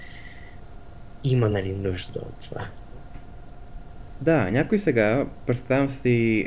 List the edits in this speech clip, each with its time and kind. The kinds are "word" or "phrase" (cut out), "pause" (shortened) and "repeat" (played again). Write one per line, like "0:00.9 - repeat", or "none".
none